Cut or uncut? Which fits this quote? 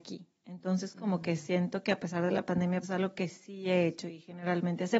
cut